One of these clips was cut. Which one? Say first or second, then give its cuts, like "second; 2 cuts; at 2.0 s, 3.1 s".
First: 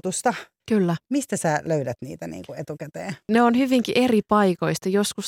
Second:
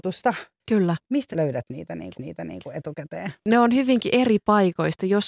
second; 2 cuts; at 1.3 s, 2.1 s